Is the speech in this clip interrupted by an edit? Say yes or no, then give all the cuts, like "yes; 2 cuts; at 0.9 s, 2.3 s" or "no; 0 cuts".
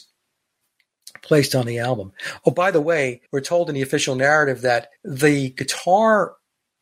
yes; 2 cuts; at 3.3 s, 5.0 s